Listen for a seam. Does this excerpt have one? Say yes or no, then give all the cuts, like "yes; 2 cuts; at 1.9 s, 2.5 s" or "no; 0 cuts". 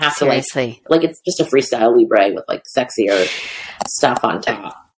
no; 0 cuts